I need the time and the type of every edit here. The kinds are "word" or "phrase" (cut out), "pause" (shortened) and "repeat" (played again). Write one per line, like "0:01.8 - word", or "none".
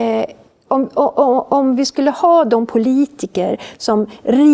none